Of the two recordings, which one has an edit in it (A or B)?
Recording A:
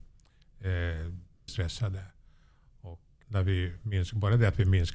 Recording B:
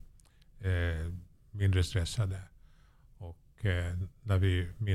A